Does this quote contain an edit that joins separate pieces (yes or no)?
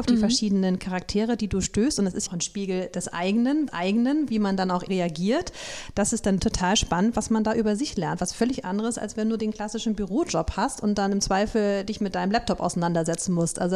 yes